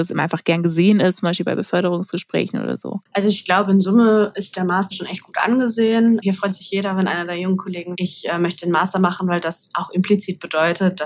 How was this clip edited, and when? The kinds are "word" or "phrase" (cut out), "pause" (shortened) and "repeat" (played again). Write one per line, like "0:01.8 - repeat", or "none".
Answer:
0:04.9 - word
0:07.9 - word

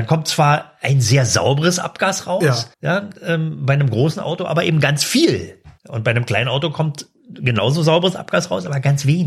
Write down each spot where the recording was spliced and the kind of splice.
0:02.7 - pause
0:05.8 - pause

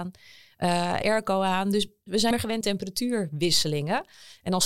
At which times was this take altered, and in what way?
0:01.0 - phrase
0:02.3 - word
0:02.6 - word

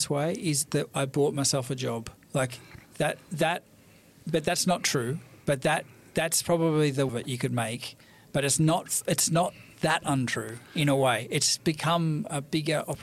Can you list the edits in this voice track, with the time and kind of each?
0:07.1 - phrase

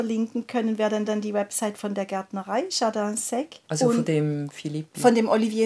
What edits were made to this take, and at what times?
0:01.1 - repeat
0:03.6 - pause

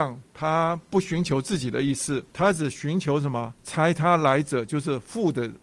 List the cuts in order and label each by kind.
0:02.3 - pause
0:03.5 - pause

